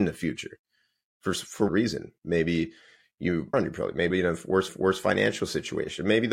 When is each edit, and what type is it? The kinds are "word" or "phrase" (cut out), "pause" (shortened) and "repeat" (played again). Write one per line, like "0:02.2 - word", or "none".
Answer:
0:01.7 - word
0:03.5 - phrase
0:04.1 - word
0:04.7 - repeat